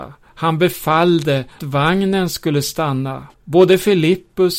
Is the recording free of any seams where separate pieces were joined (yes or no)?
no